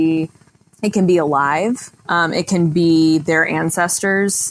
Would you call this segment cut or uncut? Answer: cut